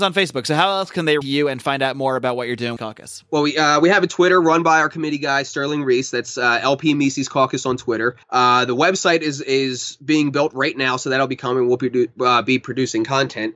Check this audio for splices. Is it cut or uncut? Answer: cut